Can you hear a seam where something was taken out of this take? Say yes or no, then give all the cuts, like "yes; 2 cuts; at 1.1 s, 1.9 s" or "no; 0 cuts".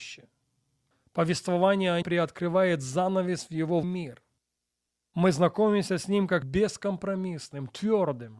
yes; 3 cuts; at 2.0 s, 3.8 s, 6.4 s